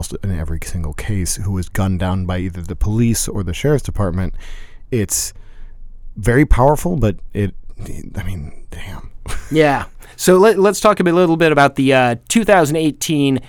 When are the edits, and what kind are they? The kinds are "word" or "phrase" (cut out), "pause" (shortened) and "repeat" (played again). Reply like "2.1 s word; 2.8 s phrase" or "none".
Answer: 10.1 s pause